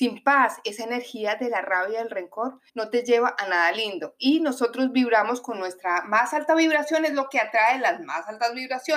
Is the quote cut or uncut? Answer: cut